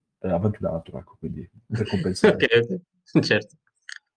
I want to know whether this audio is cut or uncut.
uncut